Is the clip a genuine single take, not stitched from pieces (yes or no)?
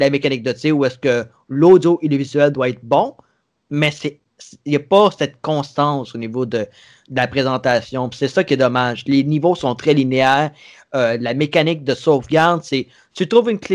yes